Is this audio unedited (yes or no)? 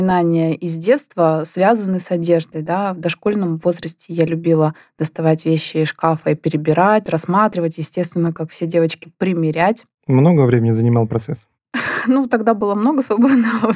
yes